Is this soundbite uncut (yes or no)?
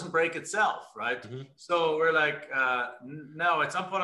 yes